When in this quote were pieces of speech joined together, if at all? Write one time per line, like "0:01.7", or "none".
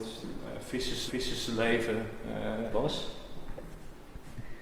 0:01.1
0:02.7